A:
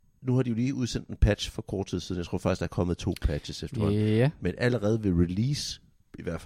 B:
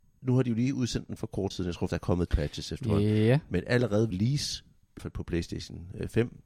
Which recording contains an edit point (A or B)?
B